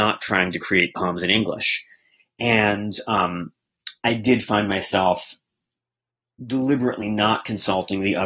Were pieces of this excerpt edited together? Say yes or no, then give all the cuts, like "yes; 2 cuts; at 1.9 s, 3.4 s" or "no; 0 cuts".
no; 0 cuts